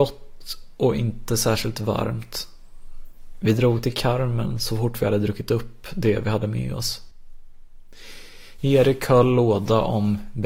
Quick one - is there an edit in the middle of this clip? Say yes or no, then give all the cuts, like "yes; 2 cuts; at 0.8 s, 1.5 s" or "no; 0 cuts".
no; 0 cuts